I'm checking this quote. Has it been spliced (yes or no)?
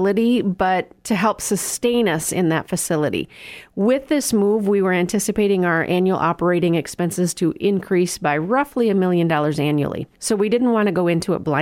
yes